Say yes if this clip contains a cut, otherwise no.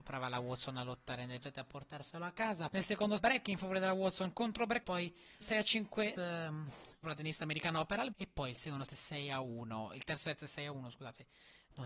yes